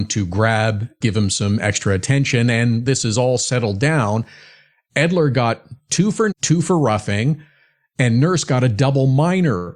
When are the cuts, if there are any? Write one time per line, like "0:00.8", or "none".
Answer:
0:01.0
0:02.9
0:06.3